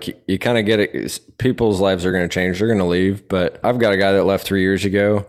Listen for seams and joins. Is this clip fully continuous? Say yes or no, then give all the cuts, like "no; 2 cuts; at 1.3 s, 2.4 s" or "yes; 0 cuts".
yes; 0 cuts